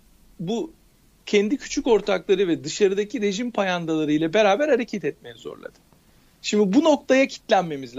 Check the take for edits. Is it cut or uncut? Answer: uncut